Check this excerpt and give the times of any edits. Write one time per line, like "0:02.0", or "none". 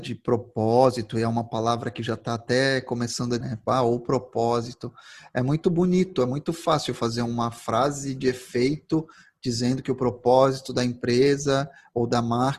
0:03.4